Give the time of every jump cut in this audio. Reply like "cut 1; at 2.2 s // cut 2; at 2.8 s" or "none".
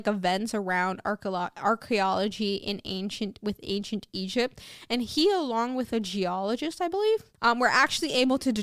cut 1; at 7.3 s